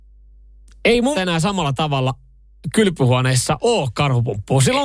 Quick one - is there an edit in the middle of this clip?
yes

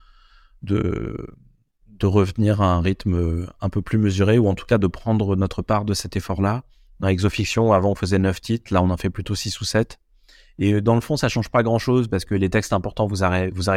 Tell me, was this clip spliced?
no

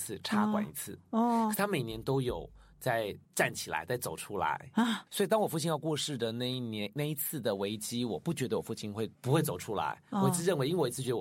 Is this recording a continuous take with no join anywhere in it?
no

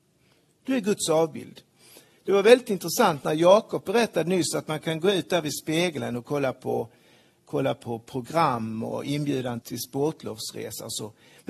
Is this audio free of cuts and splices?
no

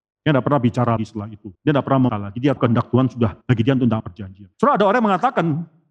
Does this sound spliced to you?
yes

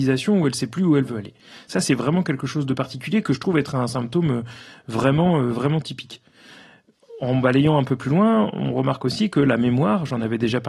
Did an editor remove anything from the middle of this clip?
no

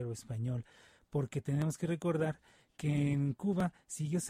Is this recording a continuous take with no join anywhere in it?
yes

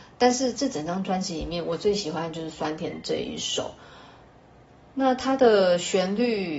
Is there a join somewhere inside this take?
no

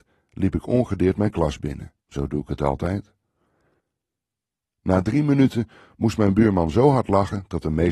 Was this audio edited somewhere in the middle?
yes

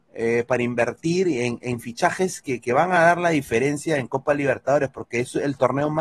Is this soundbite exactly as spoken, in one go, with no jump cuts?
yes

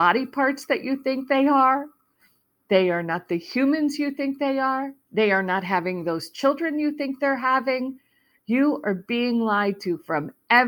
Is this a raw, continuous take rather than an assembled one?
yes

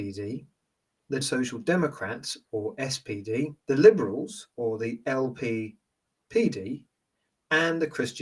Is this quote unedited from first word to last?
no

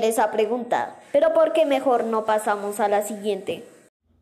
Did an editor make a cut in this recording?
no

